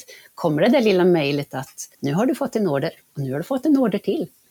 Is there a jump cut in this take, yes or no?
yes